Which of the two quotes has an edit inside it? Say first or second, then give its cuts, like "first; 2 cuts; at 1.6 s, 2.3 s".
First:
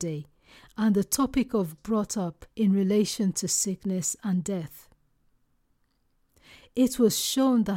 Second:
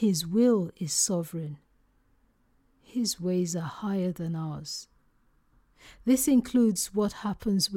first; 2 cuts; at 1.8 s, 2.5 s